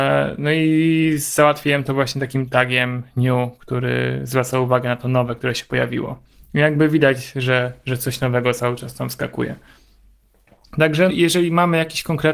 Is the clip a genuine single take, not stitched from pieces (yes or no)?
no